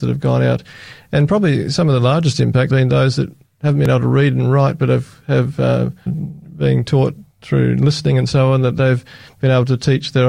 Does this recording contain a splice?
yes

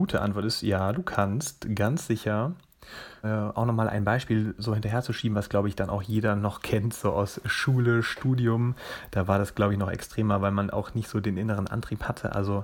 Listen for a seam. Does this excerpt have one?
yes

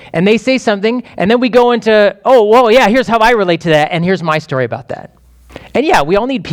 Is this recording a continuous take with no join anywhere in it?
yes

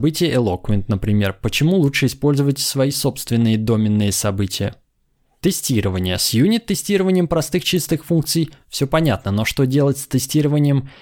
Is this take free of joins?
yes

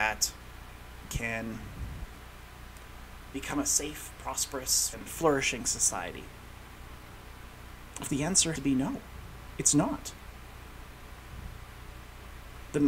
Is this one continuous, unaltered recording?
no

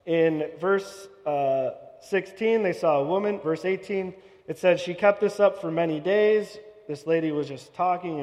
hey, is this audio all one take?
no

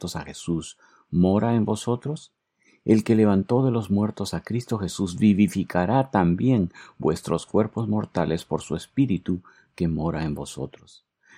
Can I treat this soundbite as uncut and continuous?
yes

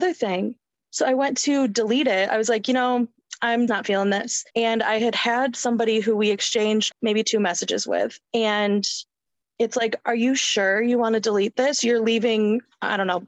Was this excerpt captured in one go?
no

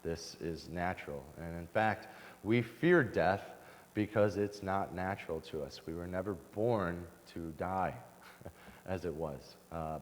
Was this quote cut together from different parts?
no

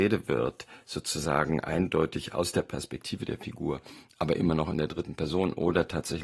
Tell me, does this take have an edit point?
no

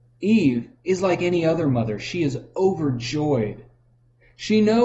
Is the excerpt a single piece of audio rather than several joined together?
yes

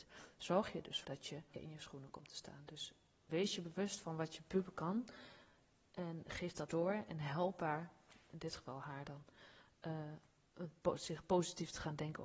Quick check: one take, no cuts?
no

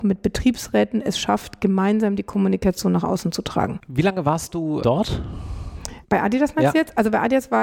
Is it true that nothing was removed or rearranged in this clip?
no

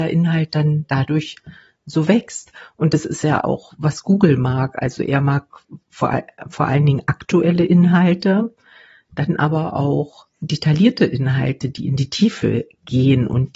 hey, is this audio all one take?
yes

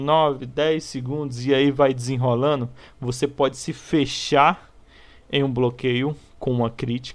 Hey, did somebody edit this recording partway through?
no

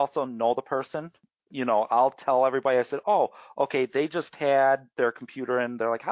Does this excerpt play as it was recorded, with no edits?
yes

